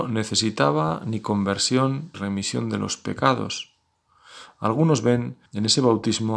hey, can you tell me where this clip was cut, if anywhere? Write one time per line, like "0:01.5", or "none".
0:02.1
0:05.5